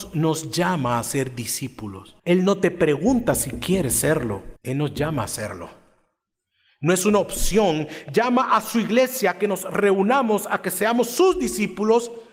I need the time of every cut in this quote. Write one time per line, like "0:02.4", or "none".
0:02.2
0:04.6

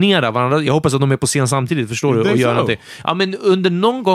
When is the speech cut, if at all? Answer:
none

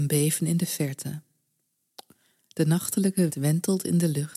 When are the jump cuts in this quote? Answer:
0:03.3

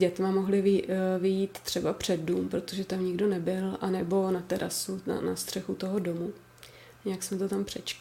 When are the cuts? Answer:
none

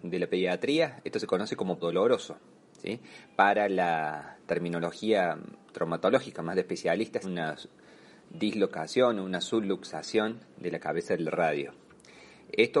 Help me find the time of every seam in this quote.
0:01.8
0:07.2

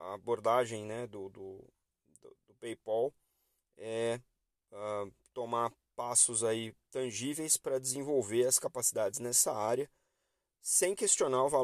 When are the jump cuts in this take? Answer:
none

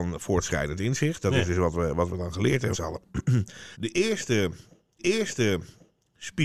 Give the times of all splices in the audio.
0:02.7
0:03.7
0:05.0

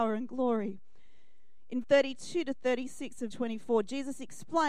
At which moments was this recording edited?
0:01.8
0:03.3

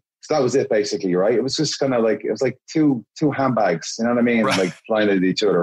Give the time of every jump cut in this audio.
none

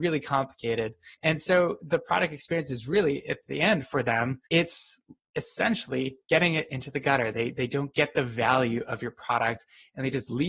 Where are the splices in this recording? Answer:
0:01.1
0:04.5

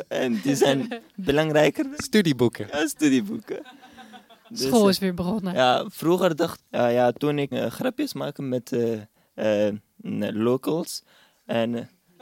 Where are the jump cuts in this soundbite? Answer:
0:06.6
0:07.5

